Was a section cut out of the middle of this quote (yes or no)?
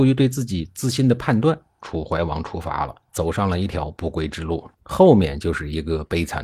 yes